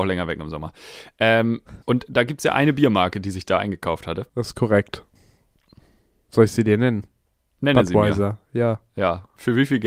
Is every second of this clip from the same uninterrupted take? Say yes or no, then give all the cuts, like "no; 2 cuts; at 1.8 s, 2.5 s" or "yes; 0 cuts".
no; 2 cuts; at 1.8 s, 4.3 s